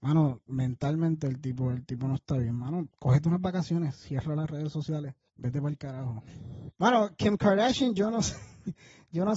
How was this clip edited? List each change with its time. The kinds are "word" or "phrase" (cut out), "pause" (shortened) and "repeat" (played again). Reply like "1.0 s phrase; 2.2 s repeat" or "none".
2.9 s pause